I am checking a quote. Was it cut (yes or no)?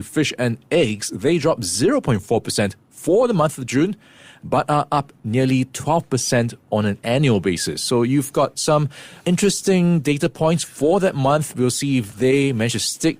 no